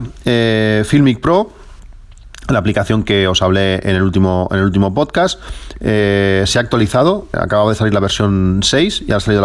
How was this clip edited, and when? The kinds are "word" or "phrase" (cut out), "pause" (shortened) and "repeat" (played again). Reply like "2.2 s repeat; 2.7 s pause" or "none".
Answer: 7.3 s word